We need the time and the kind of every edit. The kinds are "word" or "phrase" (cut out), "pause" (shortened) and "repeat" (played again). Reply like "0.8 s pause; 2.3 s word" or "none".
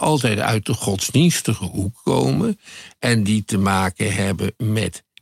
none